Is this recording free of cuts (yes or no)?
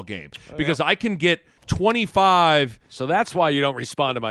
no